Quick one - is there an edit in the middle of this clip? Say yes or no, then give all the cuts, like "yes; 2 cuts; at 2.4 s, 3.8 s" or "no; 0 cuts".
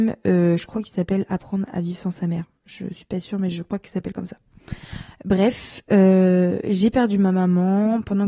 no; 0 cuts